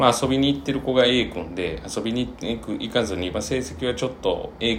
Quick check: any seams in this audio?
no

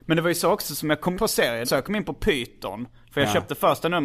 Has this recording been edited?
yes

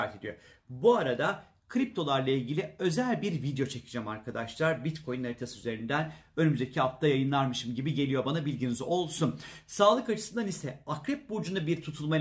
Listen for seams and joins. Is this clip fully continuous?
yes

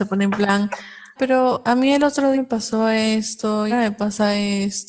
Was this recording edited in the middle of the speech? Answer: yes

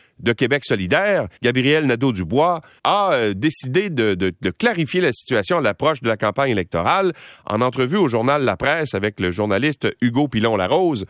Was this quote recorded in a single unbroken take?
no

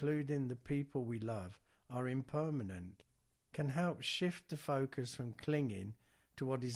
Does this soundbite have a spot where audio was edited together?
no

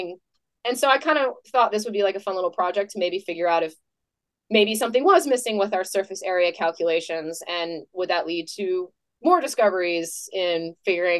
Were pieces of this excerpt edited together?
no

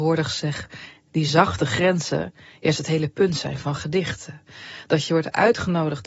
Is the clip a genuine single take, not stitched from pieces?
yes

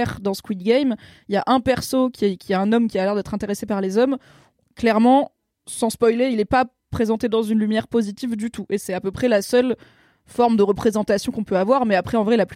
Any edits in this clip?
no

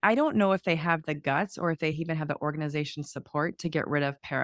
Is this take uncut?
yes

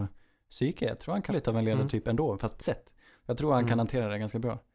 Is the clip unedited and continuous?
no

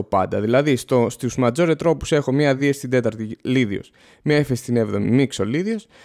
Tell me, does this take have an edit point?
no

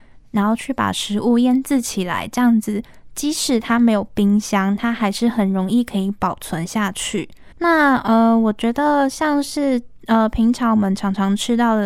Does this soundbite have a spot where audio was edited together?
yes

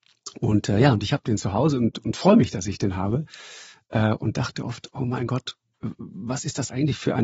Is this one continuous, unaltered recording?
yes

